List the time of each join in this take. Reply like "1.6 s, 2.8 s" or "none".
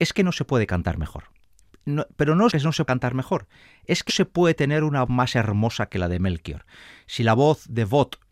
2.5 s, 2.8 s, 4.1 s, 5.1 s